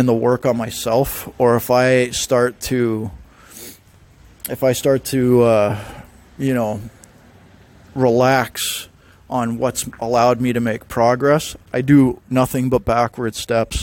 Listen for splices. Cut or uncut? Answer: uncut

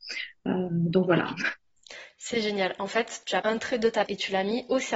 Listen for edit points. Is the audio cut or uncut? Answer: cut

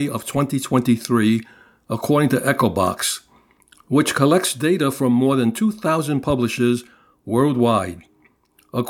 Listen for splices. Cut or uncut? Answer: uncut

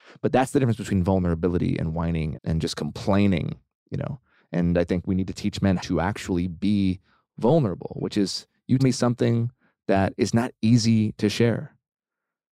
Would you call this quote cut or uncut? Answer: cut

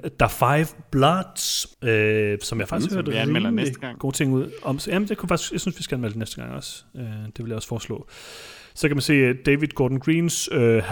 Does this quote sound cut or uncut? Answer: cut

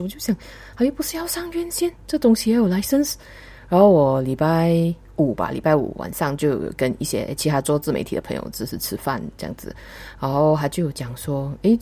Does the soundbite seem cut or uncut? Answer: uncut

